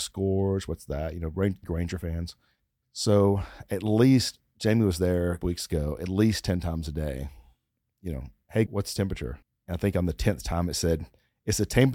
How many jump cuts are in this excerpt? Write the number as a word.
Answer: five